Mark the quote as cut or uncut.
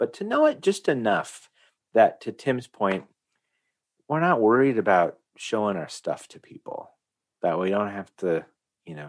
uncut